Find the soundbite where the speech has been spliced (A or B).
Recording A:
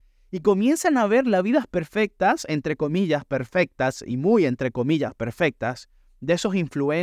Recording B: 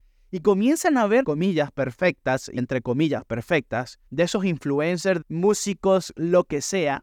B